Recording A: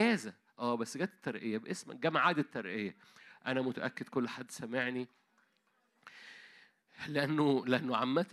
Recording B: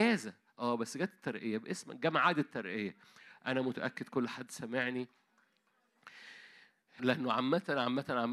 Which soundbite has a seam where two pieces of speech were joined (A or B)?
B